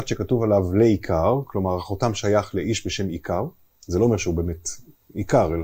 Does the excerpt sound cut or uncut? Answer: uncut